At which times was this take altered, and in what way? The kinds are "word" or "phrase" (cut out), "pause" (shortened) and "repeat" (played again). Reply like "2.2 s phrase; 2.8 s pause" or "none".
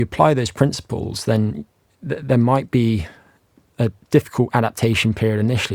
none